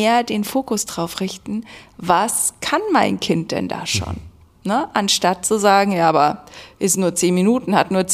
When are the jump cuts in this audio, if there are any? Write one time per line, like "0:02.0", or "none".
none